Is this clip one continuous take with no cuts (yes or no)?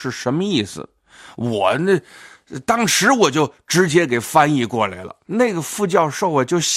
no